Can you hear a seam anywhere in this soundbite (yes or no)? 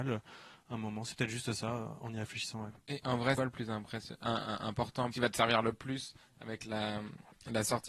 yes